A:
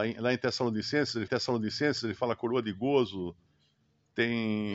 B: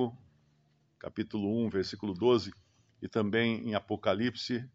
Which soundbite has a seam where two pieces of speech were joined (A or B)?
A